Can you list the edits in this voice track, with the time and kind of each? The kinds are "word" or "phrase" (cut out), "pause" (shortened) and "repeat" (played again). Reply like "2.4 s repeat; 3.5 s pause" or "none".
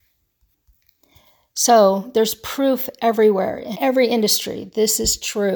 3.7 s word